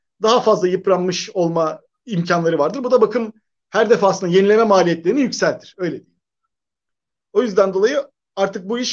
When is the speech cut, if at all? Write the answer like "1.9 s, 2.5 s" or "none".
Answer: 1.9 s